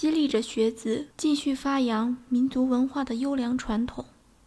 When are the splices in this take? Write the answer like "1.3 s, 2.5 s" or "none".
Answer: 1.1 s